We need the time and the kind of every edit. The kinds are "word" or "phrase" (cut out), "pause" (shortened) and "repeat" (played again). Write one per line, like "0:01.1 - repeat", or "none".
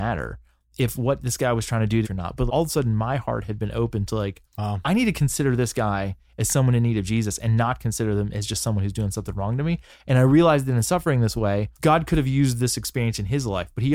0:02.0 - phrase
0:02.5 - word
0:04.5 - pause
0:11.7 - pause